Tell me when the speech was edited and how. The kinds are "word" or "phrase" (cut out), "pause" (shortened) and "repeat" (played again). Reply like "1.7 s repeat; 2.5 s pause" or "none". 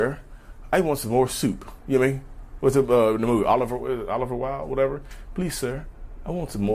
none